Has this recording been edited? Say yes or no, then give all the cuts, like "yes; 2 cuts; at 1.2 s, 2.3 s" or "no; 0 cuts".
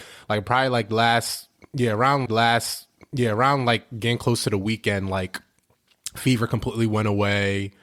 yes; 1 cut; at 2.3 s